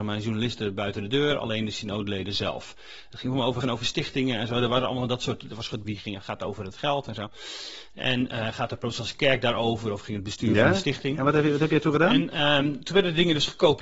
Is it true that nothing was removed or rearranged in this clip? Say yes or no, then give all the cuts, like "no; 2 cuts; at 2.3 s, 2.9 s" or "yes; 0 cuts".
no; 2 cuts; at 3.6 s, 5.8 s